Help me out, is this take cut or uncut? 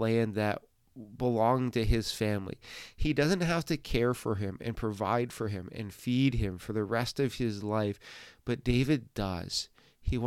uncut